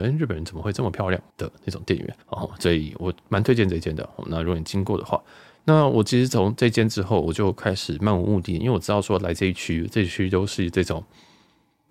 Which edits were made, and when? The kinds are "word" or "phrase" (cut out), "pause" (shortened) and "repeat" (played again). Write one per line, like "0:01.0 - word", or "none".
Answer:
0:01.3 - pause
0:02.2 - pause

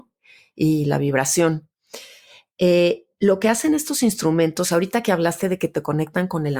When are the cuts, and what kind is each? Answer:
none

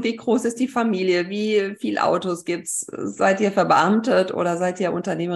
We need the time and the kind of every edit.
none

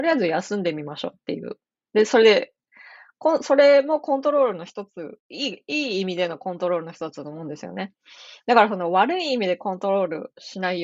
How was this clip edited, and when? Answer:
0:05.2 - pause

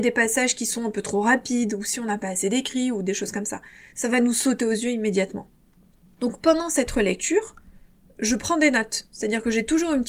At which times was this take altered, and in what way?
none

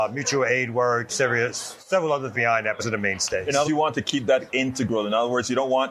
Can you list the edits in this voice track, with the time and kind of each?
0:01.1 - word
0:02.3 - word
0:02.8 - word
0:03.6 - word
0:04.5 - word

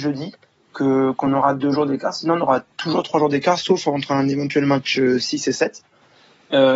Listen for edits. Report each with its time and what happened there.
none

